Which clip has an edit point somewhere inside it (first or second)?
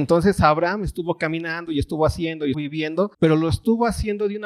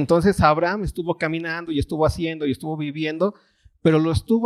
first